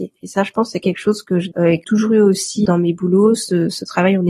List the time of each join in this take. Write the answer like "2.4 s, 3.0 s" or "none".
1.5 s, 1.8 s, 2.7 s